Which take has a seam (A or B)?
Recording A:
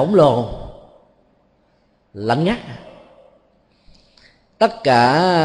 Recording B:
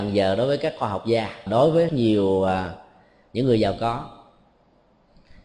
B